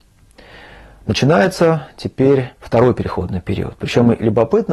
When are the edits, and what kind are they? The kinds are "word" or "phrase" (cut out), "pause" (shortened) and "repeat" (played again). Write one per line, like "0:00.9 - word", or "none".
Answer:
0:02.6 - pause